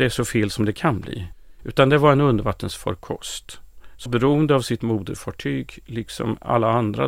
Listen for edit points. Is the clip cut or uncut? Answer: cut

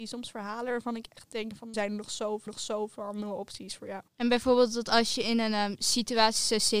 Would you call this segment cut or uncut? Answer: cut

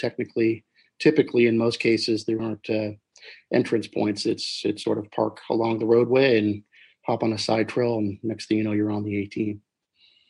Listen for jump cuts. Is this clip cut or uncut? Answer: cut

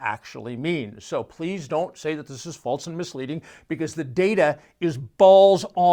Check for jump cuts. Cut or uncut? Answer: uncut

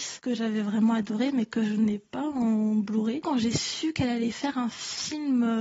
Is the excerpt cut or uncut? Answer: uncut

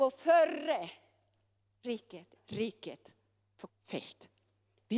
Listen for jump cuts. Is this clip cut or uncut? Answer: cut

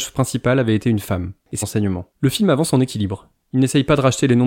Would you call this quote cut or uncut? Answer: cut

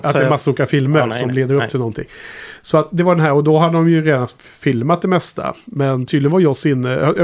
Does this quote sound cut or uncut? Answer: uncut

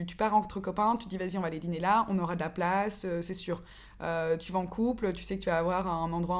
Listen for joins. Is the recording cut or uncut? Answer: uncut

